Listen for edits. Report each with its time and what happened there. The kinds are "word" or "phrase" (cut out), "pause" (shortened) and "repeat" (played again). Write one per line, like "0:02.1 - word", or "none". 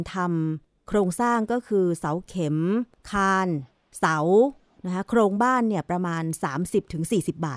none